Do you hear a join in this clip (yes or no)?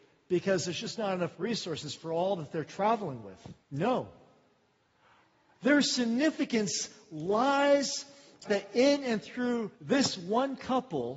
yes